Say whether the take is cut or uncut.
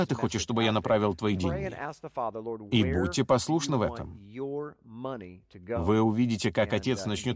uncut